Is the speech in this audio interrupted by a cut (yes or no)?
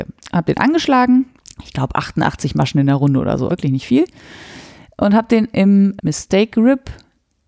yes